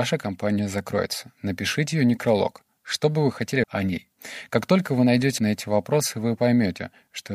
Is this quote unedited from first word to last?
no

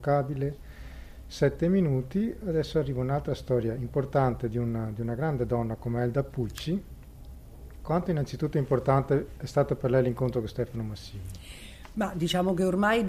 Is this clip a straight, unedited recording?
yes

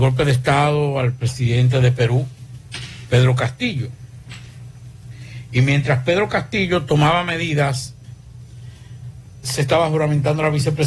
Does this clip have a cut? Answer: yes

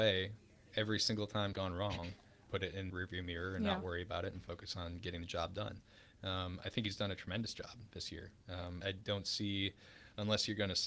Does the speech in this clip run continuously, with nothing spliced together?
no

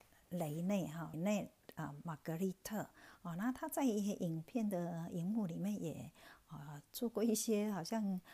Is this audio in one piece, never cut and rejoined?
no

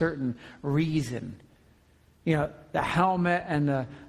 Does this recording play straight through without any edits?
yes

